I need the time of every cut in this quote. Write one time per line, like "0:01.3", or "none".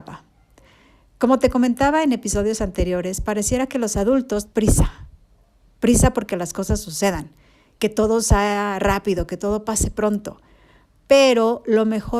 0:04.5